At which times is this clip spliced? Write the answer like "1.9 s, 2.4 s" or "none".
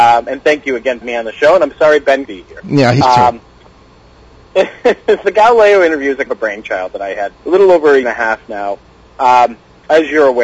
1.0 s, 2.3 s, 3.0 s, 5.2 s, 6.3 s, 7.3 s, 8.0 s

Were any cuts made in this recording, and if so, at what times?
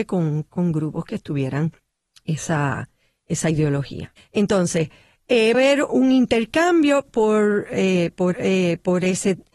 1.9 s, 4.2 s, 5.5 s, 5.9 s, 8.3 s

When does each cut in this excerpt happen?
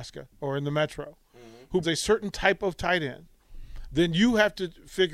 1.8 s

